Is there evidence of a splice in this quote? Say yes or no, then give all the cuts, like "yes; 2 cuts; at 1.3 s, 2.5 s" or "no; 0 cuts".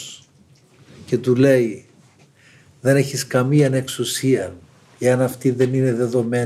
no; 0 cuts